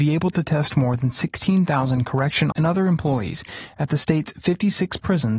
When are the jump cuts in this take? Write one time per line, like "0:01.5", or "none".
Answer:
0:02.5